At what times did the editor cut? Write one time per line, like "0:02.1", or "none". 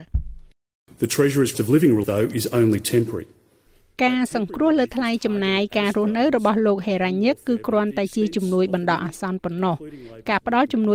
0:01.5
0:02.0